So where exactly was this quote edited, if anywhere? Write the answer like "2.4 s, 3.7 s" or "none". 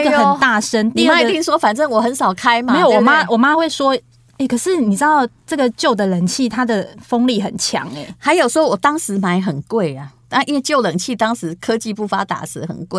none

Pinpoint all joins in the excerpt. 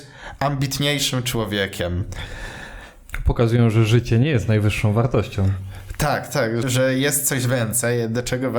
6.6 s

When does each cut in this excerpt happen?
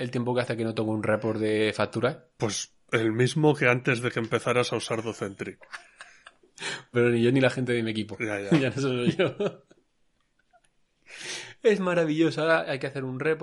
6.9 s

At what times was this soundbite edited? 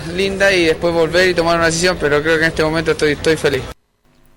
none

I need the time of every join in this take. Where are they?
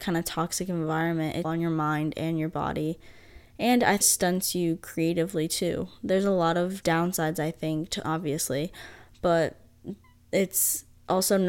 1.4 s, 4.0 s, 6.8 s, 8.0 s

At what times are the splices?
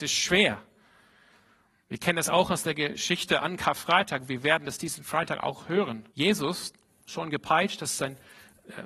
6.1 s

